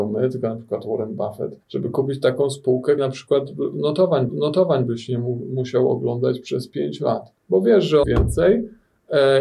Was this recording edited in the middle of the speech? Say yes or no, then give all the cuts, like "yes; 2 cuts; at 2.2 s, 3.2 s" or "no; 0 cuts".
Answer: yes; 5 cuts; at 1.6 s, 3.0 s, 4.3 s, 7.4 s, 8.0 s